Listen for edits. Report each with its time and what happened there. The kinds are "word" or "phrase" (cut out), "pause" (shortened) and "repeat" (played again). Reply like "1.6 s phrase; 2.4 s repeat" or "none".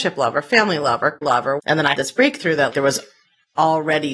1.2 s word; 1.6 s word; 1.9 s word; 2.7 s word